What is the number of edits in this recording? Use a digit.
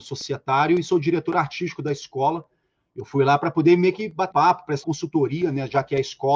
2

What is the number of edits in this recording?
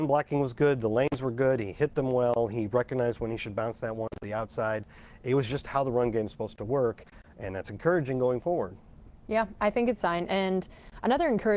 1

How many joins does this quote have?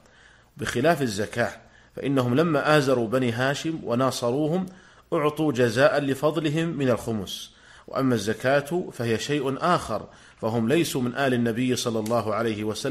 0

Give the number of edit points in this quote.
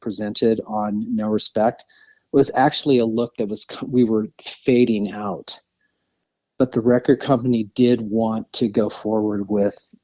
0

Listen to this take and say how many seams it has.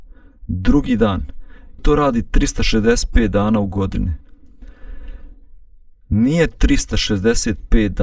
2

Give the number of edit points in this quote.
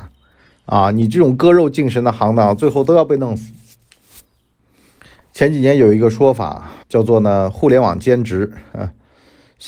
1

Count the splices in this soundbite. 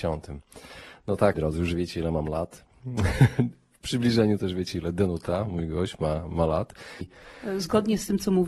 1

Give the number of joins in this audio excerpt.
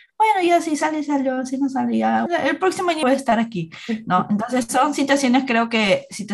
2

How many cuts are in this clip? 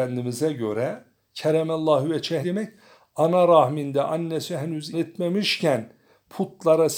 2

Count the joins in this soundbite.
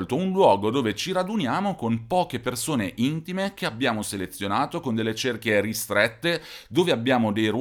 0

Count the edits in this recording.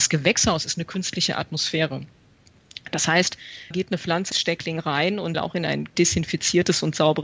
4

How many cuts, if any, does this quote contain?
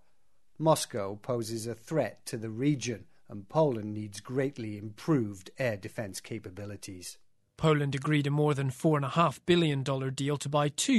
0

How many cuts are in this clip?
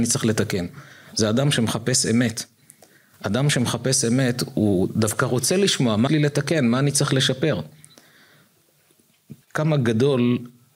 2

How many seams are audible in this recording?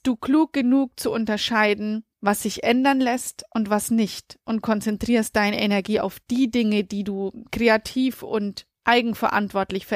2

